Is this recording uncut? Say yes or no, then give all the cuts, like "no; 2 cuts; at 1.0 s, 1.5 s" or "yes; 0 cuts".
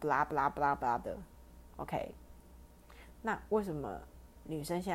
no; 1 cut; at 1.0 s